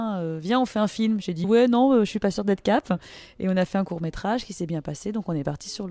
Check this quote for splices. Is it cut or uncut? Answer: cut